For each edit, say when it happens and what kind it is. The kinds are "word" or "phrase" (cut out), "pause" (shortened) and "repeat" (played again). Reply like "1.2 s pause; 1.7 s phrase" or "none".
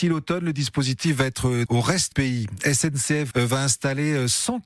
1.7 s word; 2.1 s word; 3.3 s word